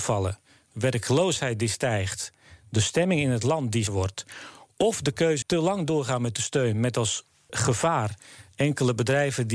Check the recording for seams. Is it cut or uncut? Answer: cut